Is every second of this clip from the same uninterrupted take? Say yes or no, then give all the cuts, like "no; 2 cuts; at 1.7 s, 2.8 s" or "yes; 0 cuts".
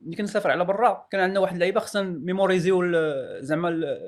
yes; 0 cuts